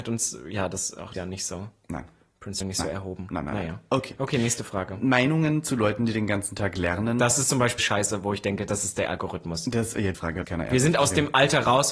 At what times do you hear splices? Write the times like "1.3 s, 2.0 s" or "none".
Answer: 1.1 s, 2.6 s, 7.8 s, 10.1 s, 10.4 s